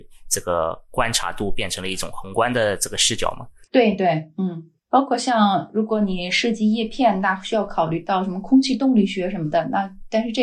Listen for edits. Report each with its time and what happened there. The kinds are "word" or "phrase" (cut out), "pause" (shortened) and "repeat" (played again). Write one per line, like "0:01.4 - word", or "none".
0:03.7 - pause
0:04.8 - pause